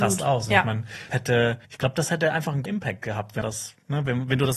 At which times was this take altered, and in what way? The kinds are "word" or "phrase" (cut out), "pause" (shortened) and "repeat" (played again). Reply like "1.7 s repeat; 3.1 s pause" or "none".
1.1 s word; 1.6 s pause; 2.7 s word; 3.4 s word